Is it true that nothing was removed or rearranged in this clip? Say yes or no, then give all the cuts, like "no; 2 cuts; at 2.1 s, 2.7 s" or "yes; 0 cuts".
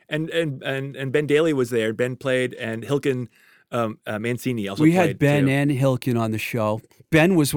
yes; 0 cuts